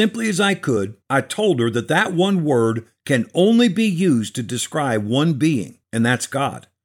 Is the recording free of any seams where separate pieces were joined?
no; 2 cuts; at 1.0 s, 5.8 s

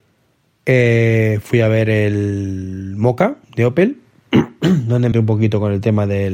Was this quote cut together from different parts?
yes; 2 cuts; at 3.4 s, 5.1 s

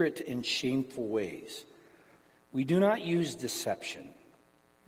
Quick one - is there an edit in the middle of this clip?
no; 0 cuts

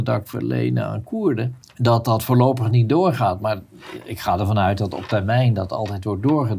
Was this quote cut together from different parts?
yes; 1 cut; at 1.6 s

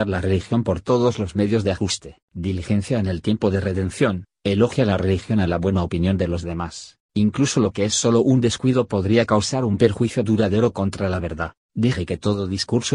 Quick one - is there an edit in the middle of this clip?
yes; 3 cuts; at 2.2 s, 7.0 s, 11.6 s

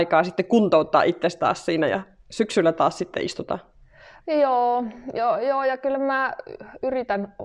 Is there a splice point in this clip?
no; 0 cuts

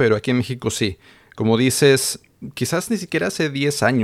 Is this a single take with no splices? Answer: yes; 0 cuts

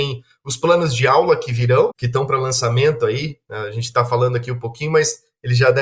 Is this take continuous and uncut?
no; 1 cut; at 1.9 s

